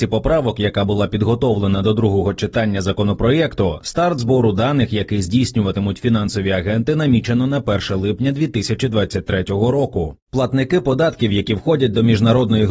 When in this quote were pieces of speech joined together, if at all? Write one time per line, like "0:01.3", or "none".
none